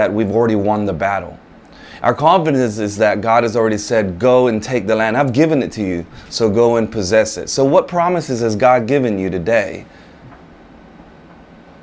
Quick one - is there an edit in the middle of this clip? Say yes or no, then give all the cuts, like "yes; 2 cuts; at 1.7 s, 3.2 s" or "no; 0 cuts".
no; 0 cuts